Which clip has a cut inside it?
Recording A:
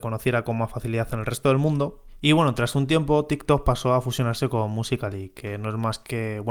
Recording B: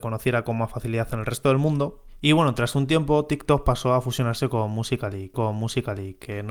B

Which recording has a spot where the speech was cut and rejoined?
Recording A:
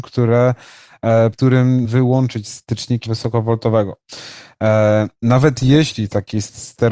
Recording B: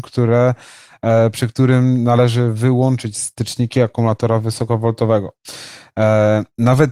A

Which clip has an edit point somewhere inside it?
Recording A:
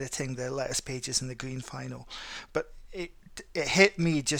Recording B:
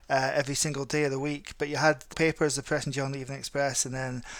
B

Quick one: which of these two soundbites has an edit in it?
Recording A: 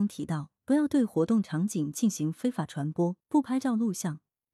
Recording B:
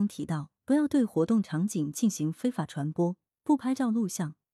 A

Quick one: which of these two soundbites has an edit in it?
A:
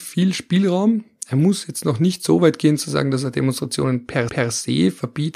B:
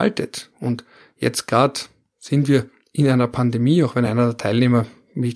A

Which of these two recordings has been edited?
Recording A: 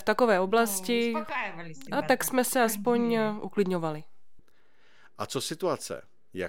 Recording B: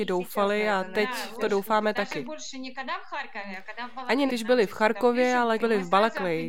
B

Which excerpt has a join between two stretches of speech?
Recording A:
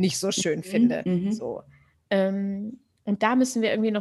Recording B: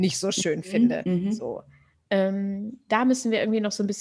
B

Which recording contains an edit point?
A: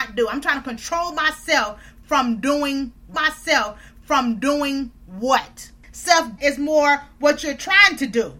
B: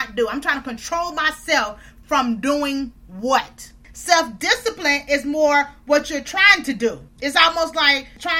A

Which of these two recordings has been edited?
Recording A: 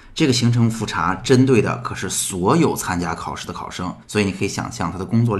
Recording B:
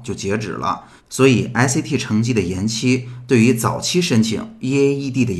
A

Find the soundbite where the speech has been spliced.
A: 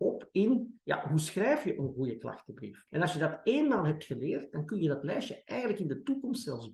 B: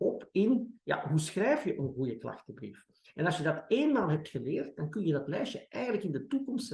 A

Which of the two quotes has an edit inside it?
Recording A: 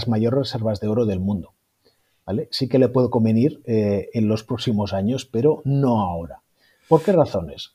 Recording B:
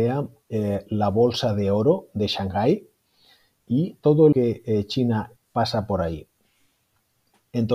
B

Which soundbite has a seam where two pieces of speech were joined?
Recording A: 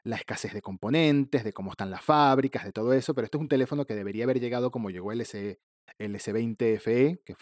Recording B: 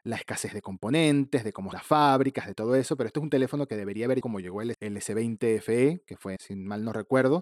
B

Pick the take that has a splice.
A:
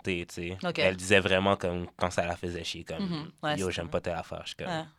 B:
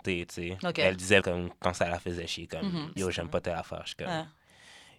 B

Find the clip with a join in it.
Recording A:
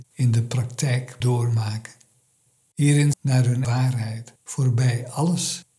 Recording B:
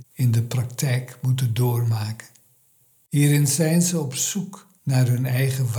A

